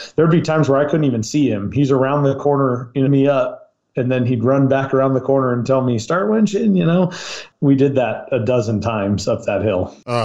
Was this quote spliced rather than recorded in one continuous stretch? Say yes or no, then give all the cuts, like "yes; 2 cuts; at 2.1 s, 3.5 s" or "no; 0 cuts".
yes; 1 cut; at 3.1 s